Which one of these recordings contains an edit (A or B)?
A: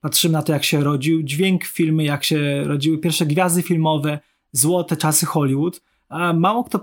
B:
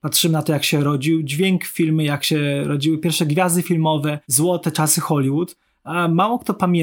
B